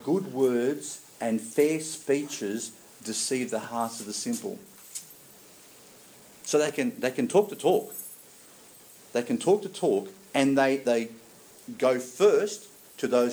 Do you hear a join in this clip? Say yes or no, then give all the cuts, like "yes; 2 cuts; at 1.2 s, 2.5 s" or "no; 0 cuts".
yes; 1 cut; at 10.9 s